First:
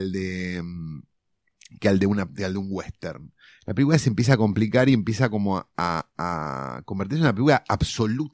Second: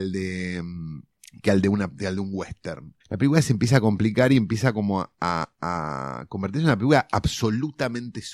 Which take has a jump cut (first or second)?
second